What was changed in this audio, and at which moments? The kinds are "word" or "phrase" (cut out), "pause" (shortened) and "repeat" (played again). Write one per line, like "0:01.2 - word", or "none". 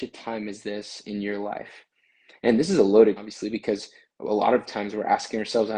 0:03.2 - word